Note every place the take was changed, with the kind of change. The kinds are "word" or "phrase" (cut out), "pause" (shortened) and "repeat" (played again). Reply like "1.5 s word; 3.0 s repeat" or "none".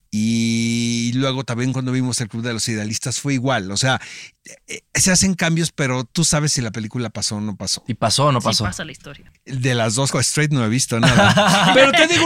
4.9 s pause; 10.1 s phrase